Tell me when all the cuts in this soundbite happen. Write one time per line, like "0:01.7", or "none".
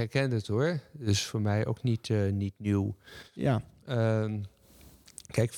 none